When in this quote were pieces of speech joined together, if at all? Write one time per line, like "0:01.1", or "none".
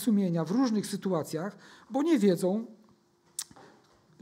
none